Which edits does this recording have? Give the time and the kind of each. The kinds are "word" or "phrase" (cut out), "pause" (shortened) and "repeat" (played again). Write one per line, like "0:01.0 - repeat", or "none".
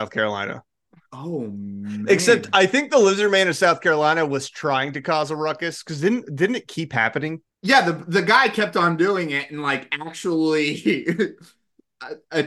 0:07.5 - pause